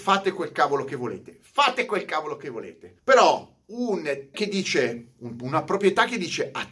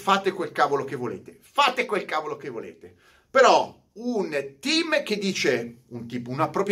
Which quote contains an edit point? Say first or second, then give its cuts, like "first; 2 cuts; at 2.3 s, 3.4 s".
first; 3 cuts; at 3.0 s, 4.3 s, 5.4 s